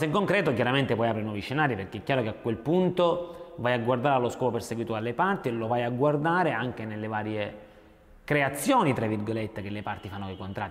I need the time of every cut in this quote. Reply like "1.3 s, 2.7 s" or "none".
none